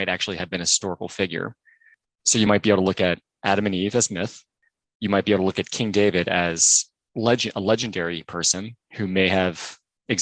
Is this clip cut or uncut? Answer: uncut